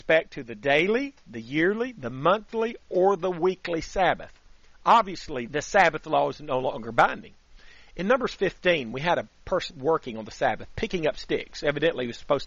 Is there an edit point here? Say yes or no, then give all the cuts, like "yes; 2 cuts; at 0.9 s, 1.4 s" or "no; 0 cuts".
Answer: yes; 2 cuts; at 5.5 s, 9.7 s